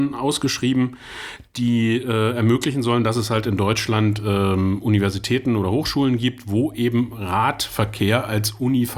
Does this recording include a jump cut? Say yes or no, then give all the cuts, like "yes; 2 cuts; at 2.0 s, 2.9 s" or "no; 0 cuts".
no; 0 cuts